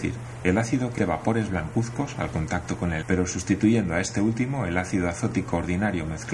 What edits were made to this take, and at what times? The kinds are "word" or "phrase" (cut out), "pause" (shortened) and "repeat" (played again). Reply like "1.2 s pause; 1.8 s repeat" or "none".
1.0 s word; 3.0 s phrase